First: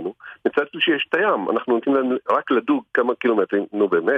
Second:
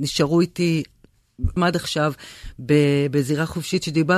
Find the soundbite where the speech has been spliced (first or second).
second